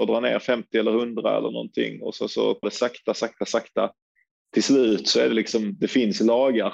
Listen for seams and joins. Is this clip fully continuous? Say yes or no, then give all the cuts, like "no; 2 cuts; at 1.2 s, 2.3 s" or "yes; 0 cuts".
no; 1 cut; at 2.6 s